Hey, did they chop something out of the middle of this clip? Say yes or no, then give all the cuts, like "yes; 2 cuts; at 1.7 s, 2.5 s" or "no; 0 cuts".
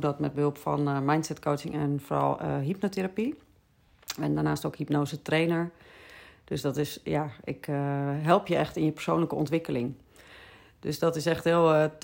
no; 0 cuts